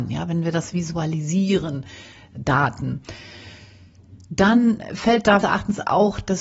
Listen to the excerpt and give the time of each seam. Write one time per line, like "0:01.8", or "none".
0:05.4